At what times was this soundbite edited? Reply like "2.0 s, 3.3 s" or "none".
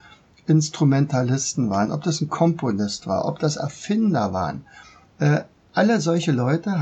none